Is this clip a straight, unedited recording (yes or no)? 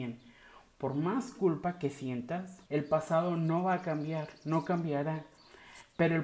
no